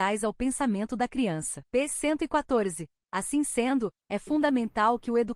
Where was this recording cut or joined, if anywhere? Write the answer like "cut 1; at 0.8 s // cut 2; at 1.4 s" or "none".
cut 1; at 1.7 s